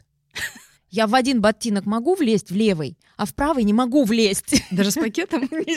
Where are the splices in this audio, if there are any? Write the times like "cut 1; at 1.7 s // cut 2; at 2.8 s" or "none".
none